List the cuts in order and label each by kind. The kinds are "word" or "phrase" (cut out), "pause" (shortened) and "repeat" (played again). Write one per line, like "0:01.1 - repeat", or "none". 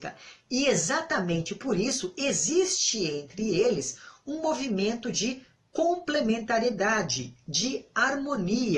none